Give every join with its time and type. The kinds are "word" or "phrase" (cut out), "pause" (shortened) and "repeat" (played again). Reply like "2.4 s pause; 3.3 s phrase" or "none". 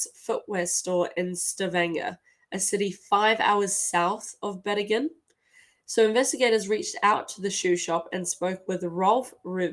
none